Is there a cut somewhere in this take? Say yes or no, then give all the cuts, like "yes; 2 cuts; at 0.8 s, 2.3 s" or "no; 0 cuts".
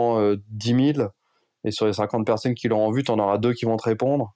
no; 0 cuts